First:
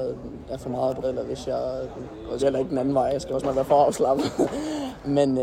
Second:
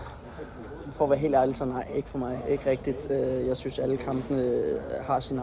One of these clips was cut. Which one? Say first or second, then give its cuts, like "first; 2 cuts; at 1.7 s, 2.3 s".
first; 3 cuts; at 1.0 s, 2.4 s, 3.4 s